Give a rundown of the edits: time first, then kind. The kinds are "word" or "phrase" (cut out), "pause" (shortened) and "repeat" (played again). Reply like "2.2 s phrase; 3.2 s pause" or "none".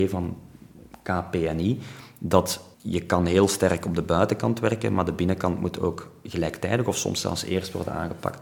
2.7 s pause